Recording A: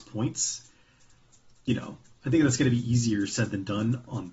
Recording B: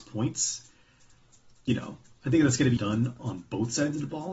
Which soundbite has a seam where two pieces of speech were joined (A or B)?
B